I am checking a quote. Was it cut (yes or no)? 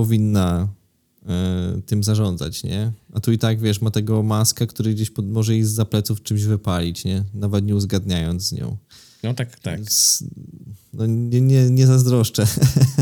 no